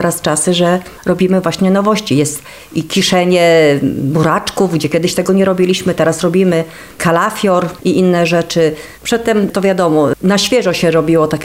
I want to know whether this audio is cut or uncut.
cut